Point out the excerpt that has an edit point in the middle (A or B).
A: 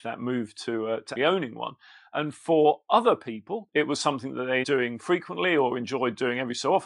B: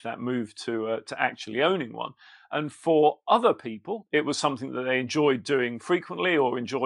A